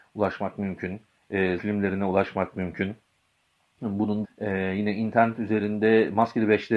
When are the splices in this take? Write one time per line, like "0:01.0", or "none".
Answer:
0:01.6
0:04.2